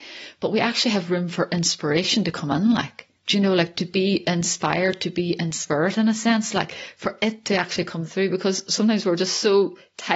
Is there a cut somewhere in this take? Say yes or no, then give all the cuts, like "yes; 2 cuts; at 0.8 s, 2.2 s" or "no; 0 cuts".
yes; 1 cut; at 3.2 s